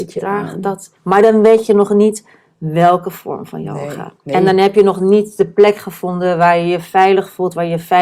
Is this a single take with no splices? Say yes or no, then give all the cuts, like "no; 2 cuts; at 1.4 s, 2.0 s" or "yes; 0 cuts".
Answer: no; 2 cuts; at 1.0 s, 4.2 s